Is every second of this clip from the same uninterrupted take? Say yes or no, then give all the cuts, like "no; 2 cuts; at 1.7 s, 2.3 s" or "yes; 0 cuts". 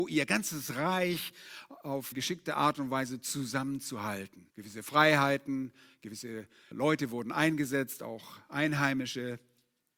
no; 3 cuts; at 2.1 s, 4.5 s, 6.7 s